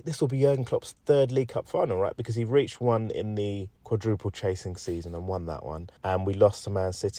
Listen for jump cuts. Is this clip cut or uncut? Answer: cut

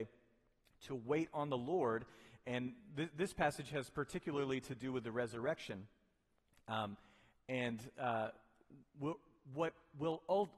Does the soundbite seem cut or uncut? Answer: uncut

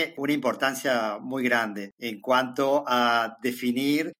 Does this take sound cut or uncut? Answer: uncut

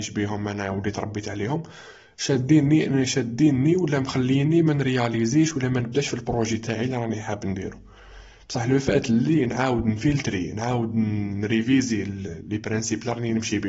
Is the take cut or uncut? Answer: uncut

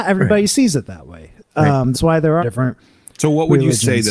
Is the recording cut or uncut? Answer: cut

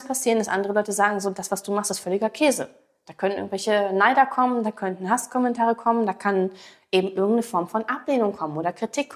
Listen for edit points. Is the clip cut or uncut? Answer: uncut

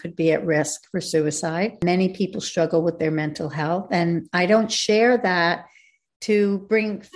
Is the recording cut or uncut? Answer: uncut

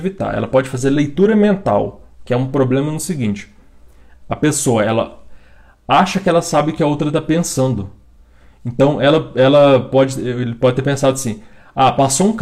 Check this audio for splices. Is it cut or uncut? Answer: uncut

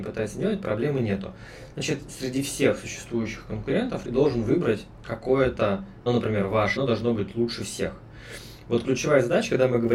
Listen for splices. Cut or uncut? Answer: cut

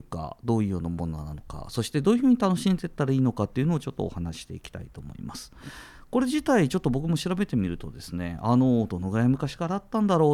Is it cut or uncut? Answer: uncut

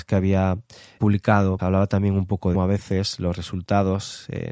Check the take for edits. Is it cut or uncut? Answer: cut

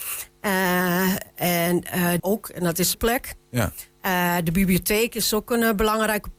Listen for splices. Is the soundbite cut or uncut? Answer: cut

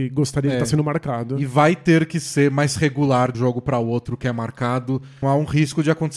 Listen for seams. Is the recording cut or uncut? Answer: cut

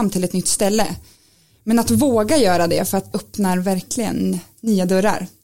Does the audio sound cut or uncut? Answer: cut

